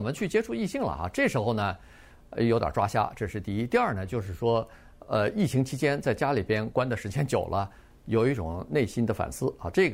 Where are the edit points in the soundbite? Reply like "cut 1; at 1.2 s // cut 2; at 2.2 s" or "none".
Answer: none